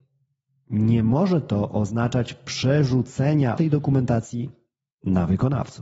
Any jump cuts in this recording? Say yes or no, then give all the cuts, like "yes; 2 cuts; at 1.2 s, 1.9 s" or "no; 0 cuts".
yes; 1 cut; at 3.6 s